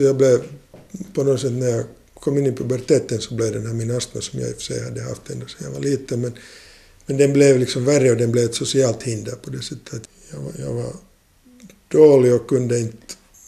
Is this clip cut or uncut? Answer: uncut